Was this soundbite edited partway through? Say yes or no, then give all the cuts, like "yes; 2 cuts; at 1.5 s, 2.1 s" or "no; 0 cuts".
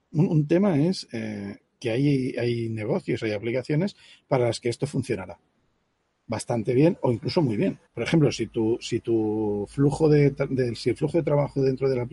yes; 1 cut; at 7.9 s